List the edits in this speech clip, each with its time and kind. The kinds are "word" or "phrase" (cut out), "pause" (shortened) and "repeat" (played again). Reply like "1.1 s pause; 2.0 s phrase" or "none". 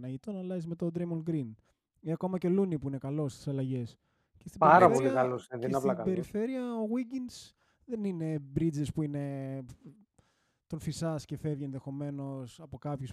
1.6 s pause